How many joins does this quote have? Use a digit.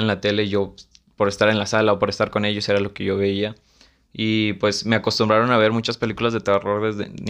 0